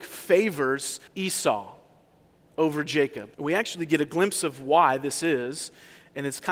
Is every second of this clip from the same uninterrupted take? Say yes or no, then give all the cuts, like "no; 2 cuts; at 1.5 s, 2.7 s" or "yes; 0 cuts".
no; 2 cuts; at 1.1 s, 3.3 s